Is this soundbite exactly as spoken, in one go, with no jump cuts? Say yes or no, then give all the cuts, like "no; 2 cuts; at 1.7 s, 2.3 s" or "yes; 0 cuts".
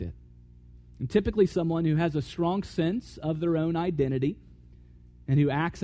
yes; 0 cuts